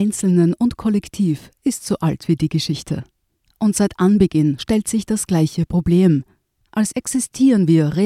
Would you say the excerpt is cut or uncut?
cut